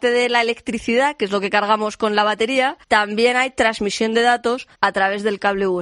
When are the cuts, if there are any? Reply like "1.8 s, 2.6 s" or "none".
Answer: 2.8 s, 4.7 s